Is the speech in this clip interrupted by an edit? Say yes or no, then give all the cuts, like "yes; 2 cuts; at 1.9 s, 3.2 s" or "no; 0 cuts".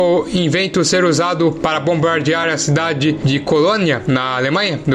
no; 0 cuts